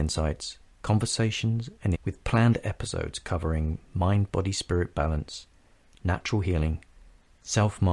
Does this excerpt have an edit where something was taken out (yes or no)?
yes